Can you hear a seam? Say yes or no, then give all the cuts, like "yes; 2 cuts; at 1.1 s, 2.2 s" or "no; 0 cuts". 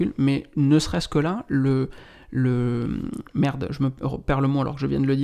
no; 0 cuts